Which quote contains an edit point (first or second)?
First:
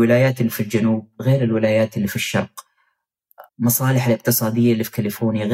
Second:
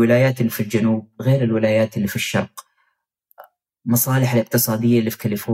first